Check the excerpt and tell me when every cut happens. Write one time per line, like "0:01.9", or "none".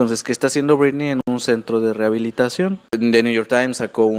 none